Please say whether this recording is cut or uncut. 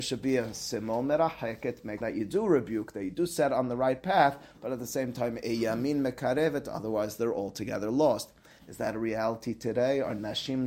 cut